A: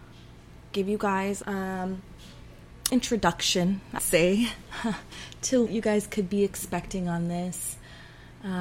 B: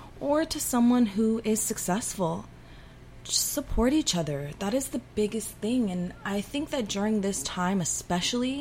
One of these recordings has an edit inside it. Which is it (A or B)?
A